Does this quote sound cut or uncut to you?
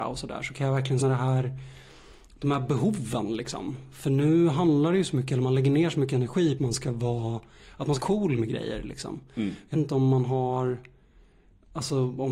cut